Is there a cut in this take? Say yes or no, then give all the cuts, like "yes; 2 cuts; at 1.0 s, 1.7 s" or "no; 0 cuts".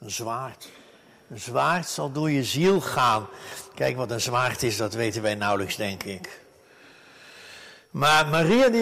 no; 0 cuts